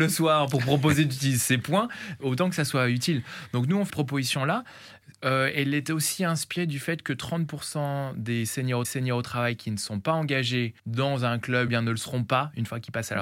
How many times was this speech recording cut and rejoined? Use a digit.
5